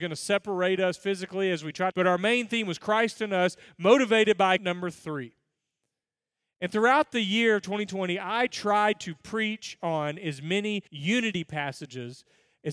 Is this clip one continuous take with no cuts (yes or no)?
no